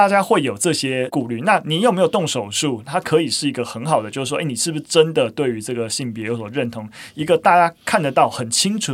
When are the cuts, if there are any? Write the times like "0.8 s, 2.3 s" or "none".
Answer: none